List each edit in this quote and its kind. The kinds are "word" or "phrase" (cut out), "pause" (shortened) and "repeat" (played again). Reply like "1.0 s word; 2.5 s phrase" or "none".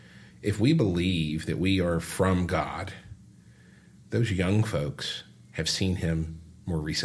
none